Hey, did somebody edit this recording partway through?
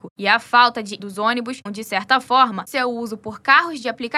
yes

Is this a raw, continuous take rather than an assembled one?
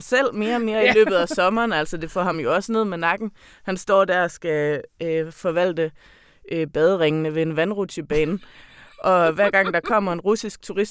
yes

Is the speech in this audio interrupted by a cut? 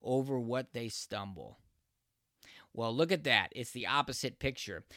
no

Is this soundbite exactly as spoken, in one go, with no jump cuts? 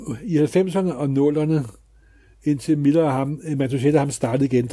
yes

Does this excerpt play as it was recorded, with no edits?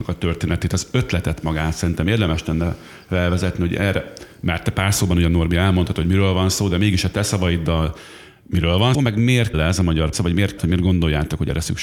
no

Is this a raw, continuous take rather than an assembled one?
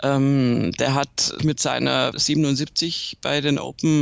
no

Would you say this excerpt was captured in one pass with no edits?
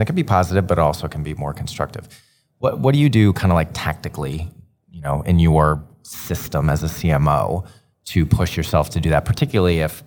yes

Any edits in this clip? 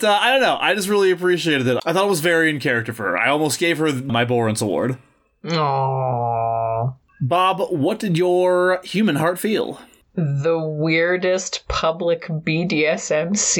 no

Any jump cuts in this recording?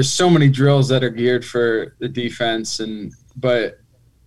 no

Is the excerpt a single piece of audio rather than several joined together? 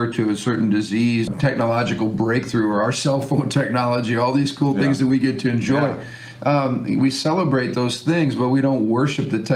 no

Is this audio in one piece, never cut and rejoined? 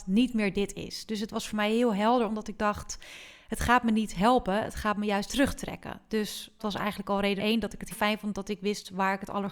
no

